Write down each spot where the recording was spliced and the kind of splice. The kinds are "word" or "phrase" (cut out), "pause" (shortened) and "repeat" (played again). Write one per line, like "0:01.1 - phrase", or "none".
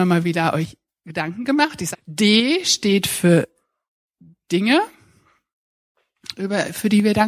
0:01.9 - phrase

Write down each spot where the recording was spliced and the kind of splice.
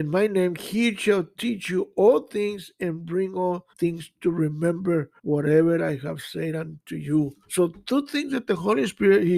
0:03.7 - pause
0:05.2 - pause
0:07.4 - pause

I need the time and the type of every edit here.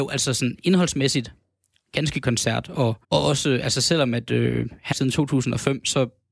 0:02.2 - word
0:03.0 - pause
0:04.9 - phrase

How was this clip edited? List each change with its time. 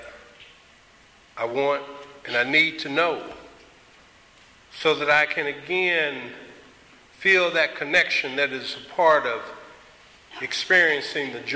none

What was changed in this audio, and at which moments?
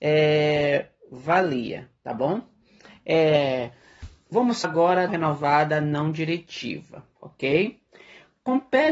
0:02.0 - pause
0:04.6 - word
0:05.1 - phrase
0:07.2 - pause

